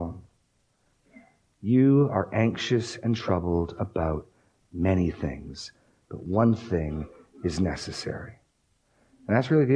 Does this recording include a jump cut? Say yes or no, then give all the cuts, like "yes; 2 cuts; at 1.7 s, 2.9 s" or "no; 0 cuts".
no; 0 cuts